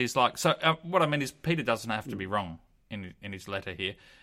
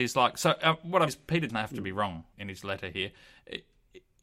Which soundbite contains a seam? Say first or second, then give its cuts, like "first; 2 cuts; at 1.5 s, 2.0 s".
second; 3 cuts; at 1.1 s, 1.5 s, 2.3 s